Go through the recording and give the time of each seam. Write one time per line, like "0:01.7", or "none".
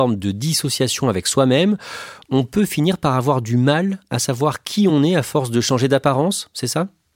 none